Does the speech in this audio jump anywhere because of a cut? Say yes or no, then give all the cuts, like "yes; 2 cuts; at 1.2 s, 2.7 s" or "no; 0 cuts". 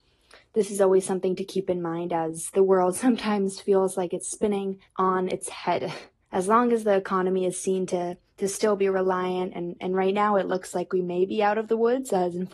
yes; 2 cuts; at 4.8 s, 6.2 s